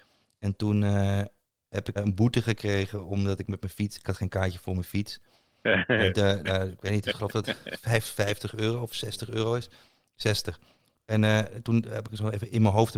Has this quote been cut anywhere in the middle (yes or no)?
yes